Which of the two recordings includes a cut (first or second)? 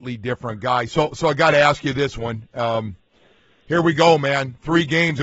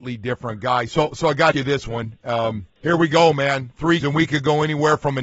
second